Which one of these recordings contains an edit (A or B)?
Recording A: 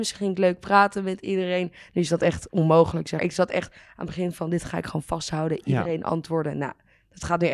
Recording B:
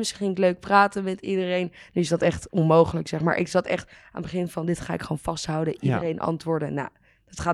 A